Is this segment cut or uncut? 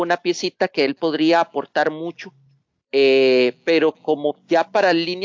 uncut